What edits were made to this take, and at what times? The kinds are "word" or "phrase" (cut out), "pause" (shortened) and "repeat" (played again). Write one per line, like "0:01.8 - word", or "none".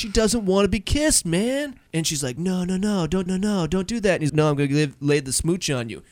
0:01.9 - pause
0:03.3 - repeat
0:04.3 - word